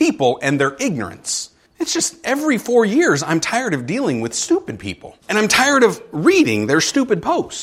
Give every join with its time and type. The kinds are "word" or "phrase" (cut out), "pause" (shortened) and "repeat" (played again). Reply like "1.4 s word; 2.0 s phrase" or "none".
1.7 s pause; 5.2 s pause